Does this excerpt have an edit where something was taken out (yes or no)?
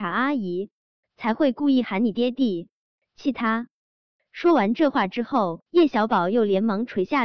yes